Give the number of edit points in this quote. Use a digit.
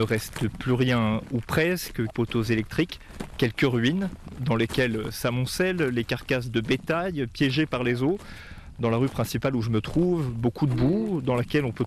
1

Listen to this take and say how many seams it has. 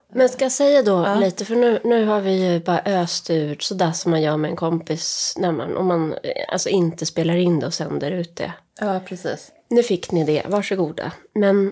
0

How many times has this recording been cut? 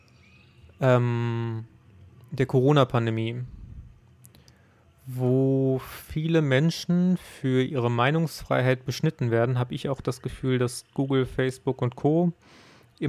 0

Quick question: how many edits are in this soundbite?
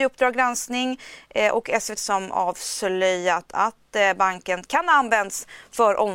1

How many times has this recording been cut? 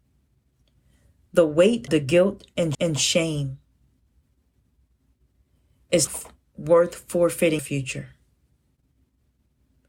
4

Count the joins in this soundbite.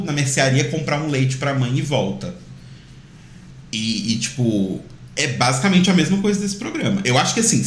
0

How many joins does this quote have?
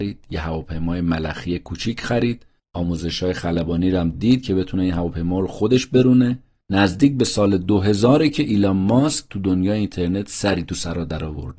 0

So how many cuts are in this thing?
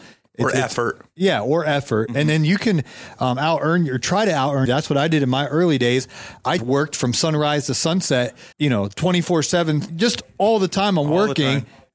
4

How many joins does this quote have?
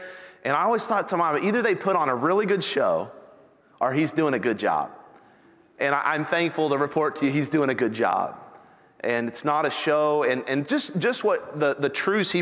0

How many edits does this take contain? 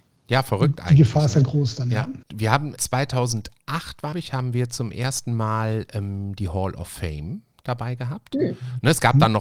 3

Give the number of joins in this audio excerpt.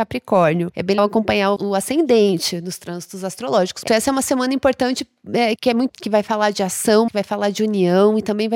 6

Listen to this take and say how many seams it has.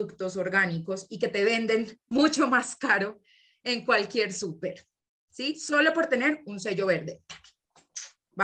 0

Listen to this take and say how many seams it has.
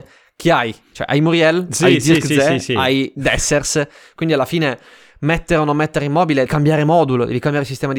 1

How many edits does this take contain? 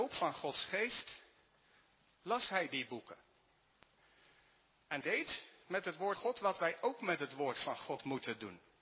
2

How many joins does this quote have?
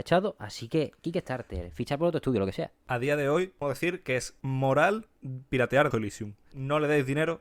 2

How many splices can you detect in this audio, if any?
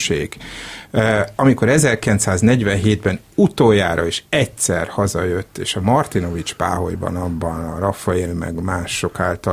1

